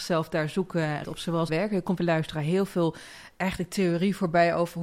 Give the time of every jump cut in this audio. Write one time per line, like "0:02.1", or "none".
0:01.0
0:01.5
0:02.0